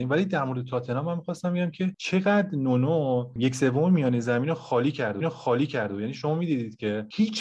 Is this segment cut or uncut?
cut